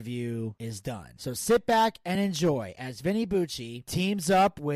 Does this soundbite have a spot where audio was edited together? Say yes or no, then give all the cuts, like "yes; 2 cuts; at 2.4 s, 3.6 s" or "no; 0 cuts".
no; 0 cuts